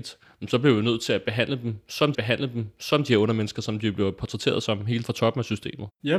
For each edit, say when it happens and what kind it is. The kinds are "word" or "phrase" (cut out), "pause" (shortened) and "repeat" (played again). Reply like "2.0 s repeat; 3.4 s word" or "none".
2.1 s repeat; 5.0 s word

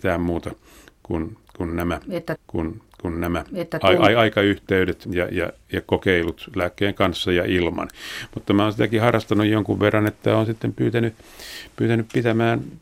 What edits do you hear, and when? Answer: 2.4 s repeat; 5.0 s word

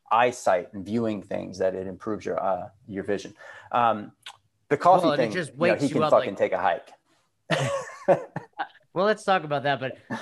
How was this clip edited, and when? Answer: none

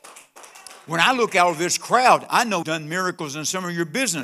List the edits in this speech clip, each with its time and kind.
2.6 s word

